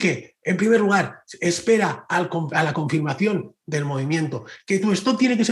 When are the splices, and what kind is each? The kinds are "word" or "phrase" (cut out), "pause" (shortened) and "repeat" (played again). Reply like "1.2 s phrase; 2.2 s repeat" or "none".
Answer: none